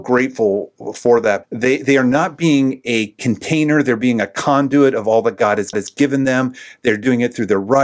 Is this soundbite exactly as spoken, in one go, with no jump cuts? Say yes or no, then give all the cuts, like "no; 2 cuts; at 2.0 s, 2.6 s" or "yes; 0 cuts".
no; 2 cuts; at 1.4 s, 5.7 s